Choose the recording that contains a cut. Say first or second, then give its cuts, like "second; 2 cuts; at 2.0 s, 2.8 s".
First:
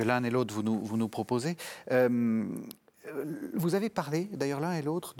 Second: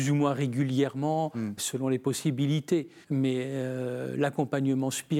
second; 2 cuts; at 1.6 s, 3.0 s